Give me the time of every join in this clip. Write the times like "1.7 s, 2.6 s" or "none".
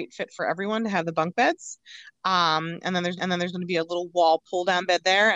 3.2 s